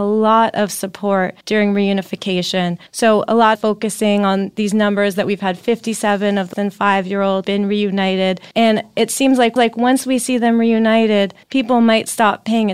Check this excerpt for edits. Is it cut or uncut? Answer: cut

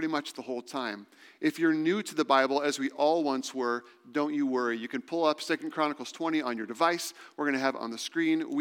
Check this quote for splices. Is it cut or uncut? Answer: uncut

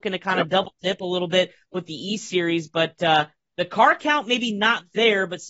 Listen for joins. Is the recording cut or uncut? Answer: uncut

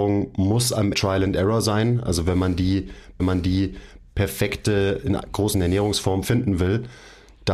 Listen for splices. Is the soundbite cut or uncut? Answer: cut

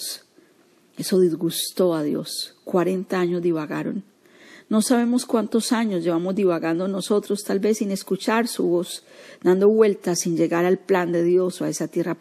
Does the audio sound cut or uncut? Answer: uncut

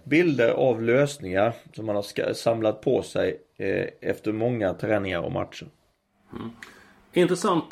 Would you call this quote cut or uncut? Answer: uncut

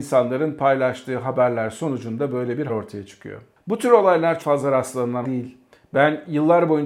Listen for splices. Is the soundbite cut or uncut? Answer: cut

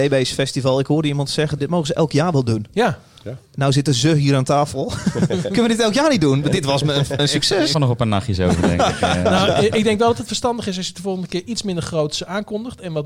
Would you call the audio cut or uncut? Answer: cut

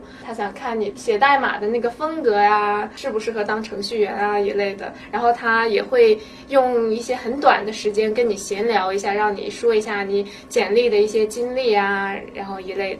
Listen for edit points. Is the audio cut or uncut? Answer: uncut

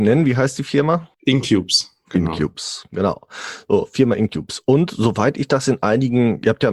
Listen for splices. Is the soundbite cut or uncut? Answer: cut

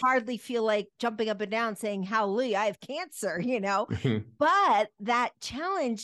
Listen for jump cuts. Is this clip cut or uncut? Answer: uncut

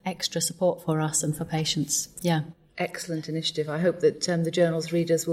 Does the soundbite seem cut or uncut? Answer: uncut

